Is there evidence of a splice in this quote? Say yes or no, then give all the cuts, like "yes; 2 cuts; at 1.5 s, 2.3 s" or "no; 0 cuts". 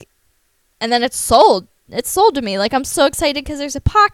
no; 0 cuts